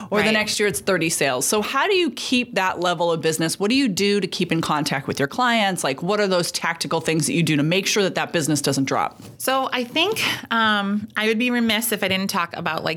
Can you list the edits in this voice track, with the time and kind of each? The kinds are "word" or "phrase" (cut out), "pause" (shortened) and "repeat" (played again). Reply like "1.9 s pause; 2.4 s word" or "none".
none